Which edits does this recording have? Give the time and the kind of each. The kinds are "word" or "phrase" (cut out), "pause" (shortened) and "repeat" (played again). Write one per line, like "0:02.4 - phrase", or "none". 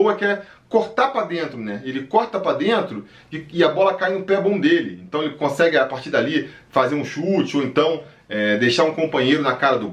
none